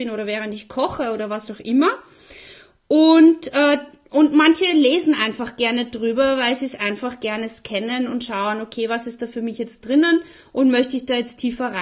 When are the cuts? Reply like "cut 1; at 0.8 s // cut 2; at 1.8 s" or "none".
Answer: none